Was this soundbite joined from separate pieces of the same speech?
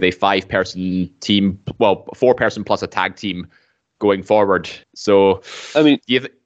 yes; 1 cut; at 4.8 s

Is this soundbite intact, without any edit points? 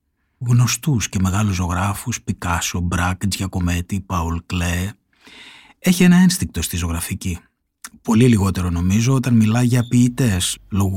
yes; 0 cuts

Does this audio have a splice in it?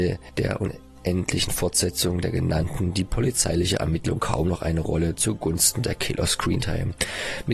no; 0 cuts

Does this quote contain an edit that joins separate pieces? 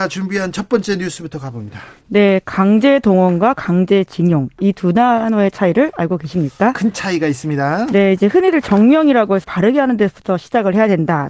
yes; 1 cut; at 9.4 s

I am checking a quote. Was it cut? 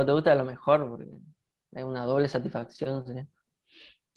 no; 0 cuts

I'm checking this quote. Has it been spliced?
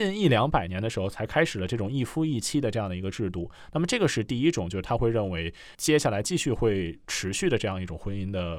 yes; 1 cut; at 5.7 s

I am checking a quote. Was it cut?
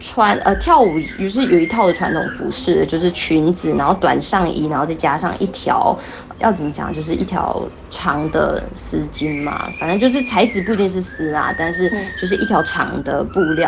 yes; 1 cut; at 6.3 s

